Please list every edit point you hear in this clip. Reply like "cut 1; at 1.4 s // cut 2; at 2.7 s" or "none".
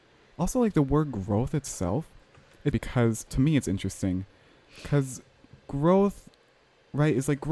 cut 1; at 2.7 s // cut 2; at 3.3 s